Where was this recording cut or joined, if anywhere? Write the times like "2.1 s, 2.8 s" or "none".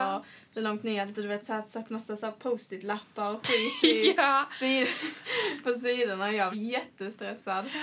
1.1 s, 6.5 s